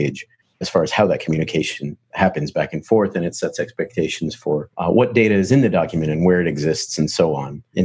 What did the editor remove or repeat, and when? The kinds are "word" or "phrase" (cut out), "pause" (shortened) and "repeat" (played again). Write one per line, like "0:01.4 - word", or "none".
0:04.7 - pause